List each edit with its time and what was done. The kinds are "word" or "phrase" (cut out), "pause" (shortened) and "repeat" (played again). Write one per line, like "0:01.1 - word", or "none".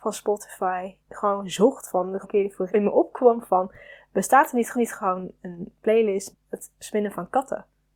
0:01.0 - pause
0:02.2 - word
0:02.7 - word
0:04.7 - repeat
0:06.3 - word